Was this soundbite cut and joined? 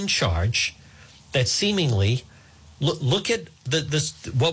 no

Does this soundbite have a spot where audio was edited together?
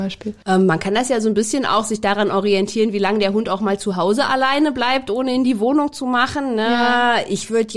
no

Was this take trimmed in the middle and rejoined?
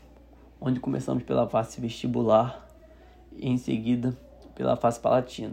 no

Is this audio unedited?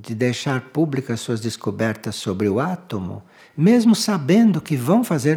yes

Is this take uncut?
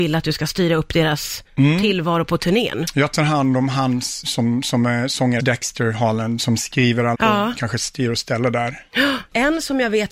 no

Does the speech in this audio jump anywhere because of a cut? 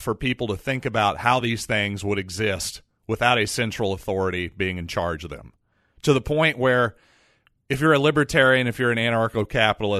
no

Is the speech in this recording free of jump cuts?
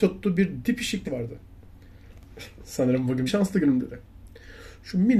no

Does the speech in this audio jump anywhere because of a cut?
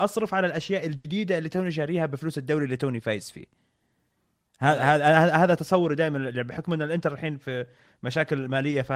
no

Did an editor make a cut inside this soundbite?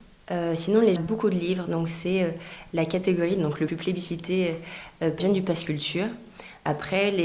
yes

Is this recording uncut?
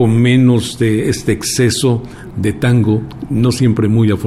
yes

